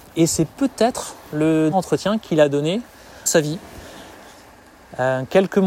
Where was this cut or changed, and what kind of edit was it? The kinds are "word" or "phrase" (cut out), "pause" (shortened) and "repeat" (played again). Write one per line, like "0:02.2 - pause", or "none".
0:01.7 - word
0:03.3 - word